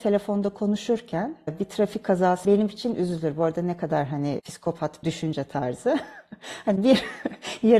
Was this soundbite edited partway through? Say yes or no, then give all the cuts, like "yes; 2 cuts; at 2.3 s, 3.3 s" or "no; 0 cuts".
yes; 2 cuts; at 2.4 s, 5.0 s